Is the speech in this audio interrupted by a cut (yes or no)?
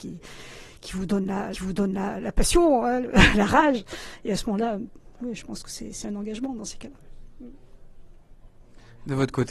yes